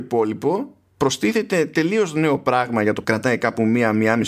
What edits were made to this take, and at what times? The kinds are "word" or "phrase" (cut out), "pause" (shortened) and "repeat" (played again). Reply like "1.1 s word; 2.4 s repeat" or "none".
3.0 s phrase